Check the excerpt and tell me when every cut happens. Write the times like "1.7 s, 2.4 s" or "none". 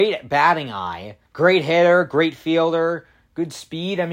1.3 s